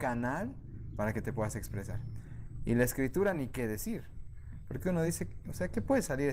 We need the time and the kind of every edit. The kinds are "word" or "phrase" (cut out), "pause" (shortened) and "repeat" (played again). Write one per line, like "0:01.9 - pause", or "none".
none